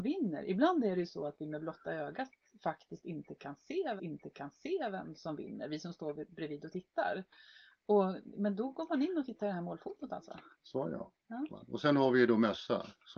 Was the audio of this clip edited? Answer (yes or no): yes